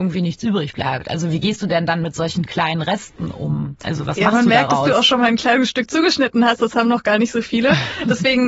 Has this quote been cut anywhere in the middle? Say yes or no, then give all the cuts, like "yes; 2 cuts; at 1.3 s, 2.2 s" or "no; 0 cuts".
no; 0 cuts